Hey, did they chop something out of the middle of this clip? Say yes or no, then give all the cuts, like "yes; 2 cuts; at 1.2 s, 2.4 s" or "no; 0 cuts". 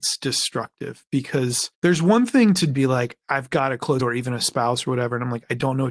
yes; 3 cuts; at 1.7 s, 2.7 s, 4.0 s